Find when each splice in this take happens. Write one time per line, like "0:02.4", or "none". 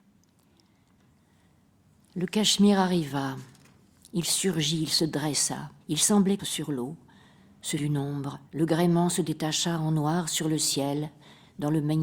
0:05.8
0:06.4
0:07.8
0:08.5

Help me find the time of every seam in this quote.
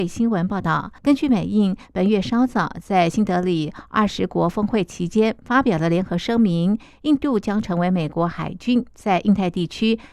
0:01.0

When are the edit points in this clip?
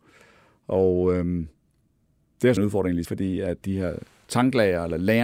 0:02.6
0:03.0
0:03.6

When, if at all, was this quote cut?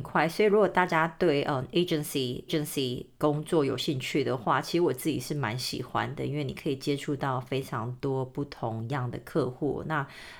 0:02.5

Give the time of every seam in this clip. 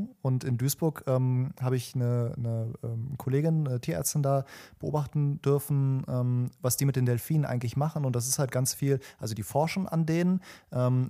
none

